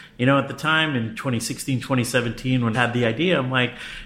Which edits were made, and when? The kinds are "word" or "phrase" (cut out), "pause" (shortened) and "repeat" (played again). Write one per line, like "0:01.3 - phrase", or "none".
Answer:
0:02.7 - phrase